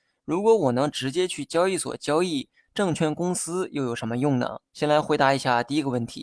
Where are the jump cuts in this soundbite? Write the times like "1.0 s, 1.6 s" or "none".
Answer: 4.7 s